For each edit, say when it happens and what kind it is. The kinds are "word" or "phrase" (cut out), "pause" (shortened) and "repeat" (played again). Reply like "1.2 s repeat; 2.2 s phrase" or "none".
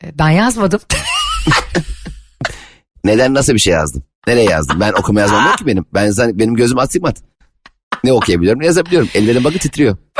none